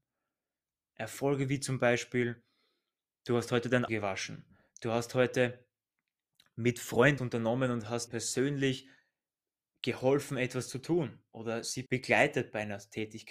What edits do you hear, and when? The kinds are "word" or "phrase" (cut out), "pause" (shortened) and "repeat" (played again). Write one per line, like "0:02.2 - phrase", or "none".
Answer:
0:03.9 - word
0:07.2 - word
0:08.1 - word
0:11.9 - word